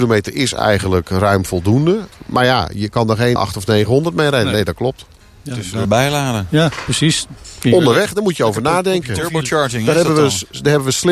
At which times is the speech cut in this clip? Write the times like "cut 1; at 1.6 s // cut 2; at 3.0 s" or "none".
cut 1; at 3.4 s // cut 2; at 5.8 s